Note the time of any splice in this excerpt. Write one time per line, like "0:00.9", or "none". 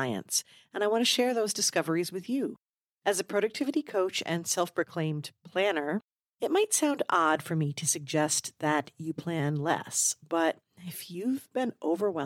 none